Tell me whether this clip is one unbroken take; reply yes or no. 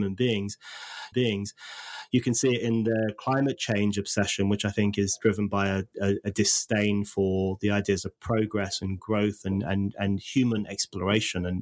no